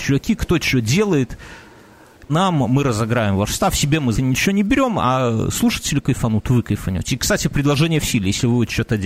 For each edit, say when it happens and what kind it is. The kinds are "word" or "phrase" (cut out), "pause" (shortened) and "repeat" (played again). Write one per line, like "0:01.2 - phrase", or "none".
0:02.3 - word
0:04.1 - word